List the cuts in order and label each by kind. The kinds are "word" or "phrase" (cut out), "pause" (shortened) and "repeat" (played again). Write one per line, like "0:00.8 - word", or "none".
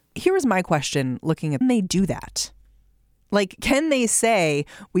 0:01.6 - phrase